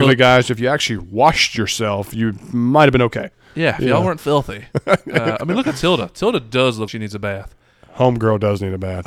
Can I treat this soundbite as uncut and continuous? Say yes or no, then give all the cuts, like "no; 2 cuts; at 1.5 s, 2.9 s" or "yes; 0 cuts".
no; 2 cuts; at 4.2 s, 6.9 s